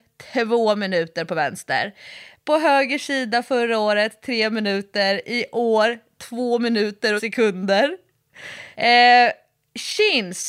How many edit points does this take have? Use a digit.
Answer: 2